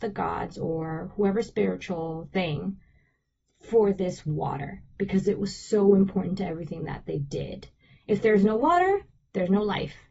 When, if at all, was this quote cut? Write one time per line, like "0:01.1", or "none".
none